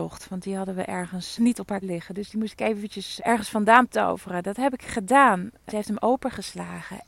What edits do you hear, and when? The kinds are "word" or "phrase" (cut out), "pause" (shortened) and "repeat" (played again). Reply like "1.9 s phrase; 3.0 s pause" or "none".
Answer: 1.4 s word; 1.8 s word; 3.2 s word; 5.7 s word